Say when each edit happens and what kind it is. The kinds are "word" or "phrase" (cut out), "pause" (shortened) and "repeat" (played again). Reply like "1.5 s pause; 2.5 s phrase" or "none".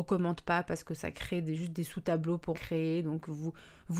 2.5 s word